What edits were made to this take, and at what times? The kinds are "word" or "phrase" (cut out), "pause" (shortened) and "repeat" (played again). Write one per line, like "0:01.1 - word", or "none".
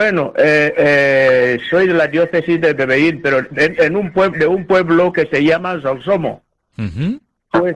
none